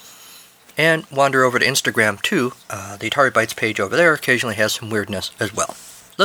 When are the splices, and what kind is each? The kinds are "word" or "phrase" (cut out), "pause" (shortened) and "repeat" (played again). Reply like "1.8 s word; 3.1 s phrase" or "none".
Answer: 2.6 s pause